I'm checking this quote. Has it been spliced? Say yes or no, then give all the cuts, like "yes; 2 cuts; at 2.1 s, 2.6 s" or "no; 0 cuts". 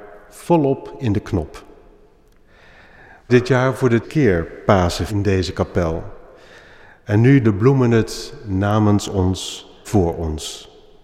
yes; 5 cuts; at 3.3 s, 4.0 s, 5.1 s, 7.4 s, 9.8 s